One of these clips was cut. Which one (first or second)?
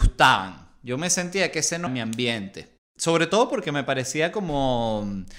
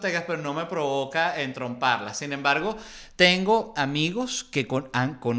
first